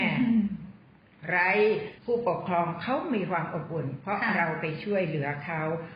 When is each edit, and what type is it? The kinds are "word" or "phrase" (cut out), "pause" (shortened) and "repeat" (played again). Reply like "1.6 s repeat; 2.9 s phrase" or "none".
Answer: 2.0 s pause